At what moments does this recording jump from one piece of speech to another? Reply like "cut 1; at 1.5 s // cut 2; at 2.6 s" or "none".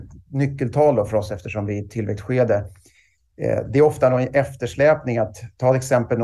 none